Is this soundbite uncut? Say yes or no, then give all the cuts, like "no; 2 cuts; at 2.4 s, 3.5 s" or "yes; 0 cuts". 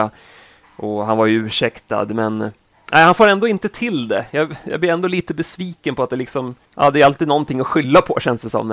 no; 1 cut; at 6.7 s